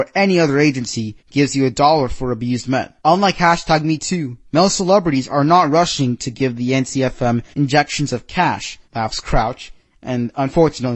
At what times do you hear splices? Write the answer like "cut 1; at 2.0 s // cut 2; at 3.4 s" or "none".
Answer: cut 1; at 1.2 s // cut 2; at 3.0 s // cut 3; at 7.5 s // cut 4; at 8.8 s